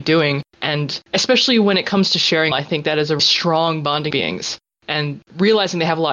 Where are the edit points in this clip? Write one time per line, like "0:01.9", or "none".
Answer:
0:02.5
0:03.2
0:04.1